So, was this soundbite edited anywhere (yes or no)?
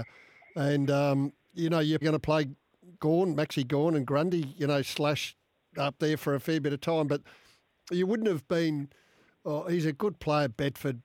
yes